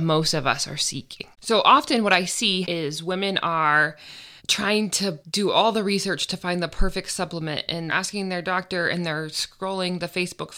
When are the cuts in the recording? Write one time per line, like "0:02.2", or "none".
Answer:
0:01.3
0:02.6
0:04.4
0:05.2
0:07.9